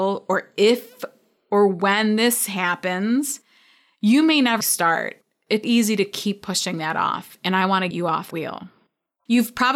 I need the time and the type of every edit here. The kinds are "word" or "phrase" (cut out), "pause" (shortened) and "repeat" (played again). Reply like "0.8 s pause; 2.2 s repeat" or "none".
4.6 s word; 5.6 s word; 7.9 s word; 8.3 s word